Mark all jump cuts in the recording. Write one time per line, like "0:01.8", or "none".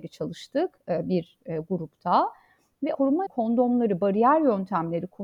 0:02.9
0:03.3